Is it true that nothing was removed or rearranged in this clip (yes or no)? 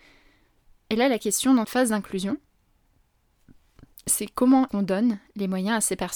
no